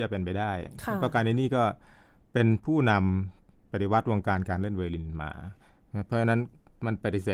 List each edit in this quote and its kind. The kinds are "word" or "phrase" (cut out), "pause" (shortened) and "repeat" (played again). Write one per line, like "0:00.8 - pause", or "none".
none